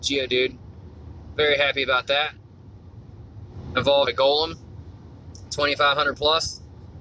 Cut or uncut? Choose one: cut